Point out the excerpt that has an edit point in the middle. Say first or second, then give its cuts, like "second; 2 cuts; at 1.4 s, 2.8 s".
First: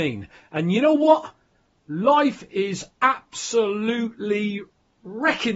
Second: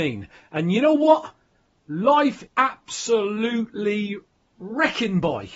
second; 1 cut; at 2.5 s